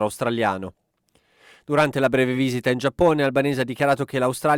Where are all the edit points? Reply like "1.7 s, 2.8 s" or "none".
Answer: none